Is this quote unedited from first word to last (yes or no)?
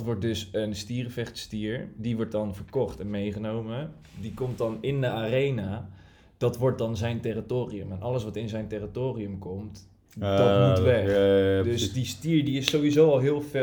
yes